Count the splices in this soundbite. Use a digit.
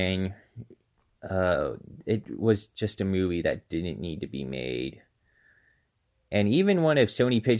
0